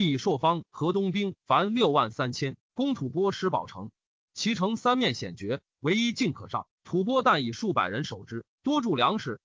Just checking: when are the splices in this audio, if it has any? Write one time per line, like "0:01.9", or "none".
0:01.4